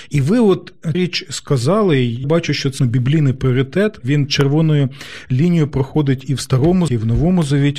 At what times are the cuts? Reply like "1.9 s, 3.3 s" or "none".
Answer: 0.9 s, 2.2 s, 2.8 s, 4.0 s, 6.9 s